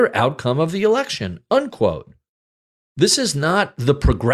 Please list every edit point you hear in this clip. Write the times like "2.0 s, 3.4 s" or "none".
none